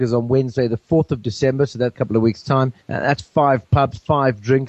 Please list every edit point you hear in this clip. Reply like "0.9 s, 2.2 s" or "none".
1.9 s, 2.8 s